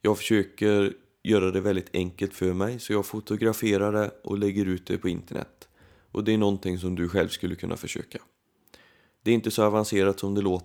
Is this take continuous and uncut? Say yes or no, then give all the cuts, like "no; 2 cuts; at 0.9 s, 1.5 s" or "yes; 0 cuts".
yes; 0 cuts